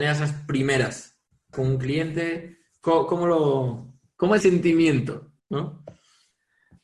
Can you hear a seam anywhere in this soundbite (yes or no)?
yes